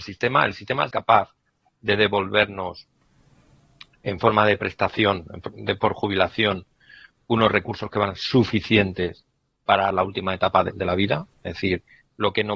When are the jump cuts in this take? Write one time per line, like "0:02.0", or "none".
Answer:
0:00.9
0:08.2
0:09.9
0:10.7